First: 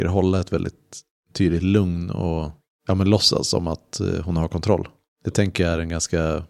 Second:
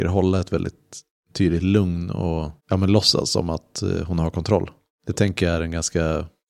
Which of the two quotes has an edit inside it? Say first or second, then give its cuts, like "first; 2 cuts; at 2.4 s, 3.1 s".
second; 1 cut; at 2.6 s